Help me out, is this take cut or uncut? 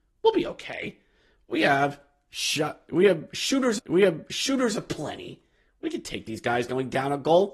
cut